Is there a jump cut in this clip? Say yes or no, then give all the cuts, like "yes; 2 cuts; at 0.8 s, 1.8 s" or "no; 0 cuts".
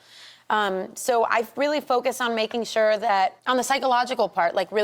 yes; 1 cut; at 3.4 s